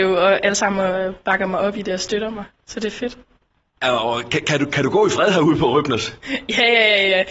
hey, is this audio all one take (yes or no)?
yes